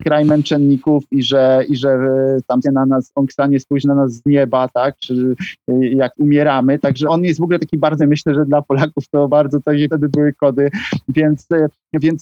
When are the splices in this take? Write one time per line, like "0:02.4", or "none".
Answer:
0:02.6
0:06.2
0:07.1
0:08.0
0:09.3
0:09.9